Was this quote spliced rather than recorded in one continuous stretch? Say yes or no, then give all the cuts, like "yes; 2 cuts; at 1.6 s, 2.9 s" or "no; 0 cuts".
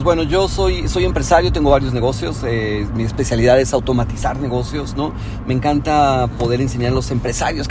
no; 0 cuts